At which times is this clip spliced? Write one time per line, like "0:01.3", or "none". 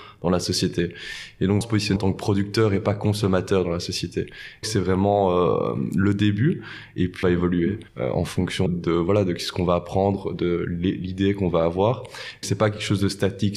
0:01.6
0:02.0
0:04.6
0:07.2
0:07.9
0:08.7
0:12.4